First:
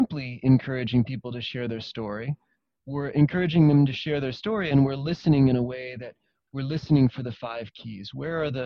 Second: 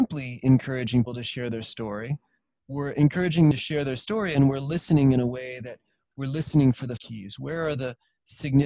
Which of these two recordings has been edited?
second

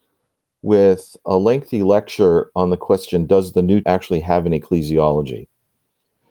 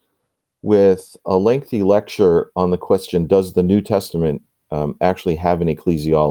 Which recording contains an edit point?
first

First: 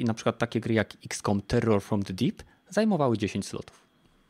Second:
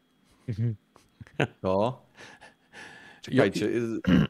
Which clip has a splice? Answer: second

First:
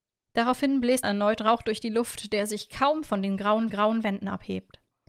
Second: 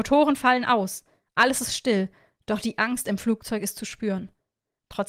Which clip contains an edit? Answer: first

